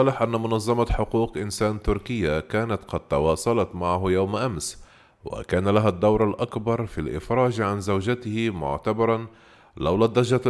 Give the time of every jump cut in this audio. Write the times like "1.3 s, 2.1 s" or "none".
none